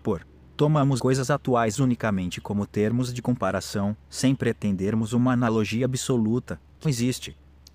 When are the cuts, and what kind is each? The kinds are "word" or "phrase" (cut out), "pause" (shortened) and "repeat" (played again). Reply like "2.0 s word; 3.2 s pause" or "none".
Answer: 1.0 s word; 6.8 s word

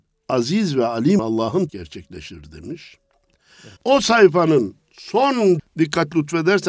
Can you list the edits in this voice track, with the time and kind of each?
1.2 s word; 1.7 s phrase; 3.8 s pause; 5.6 s word

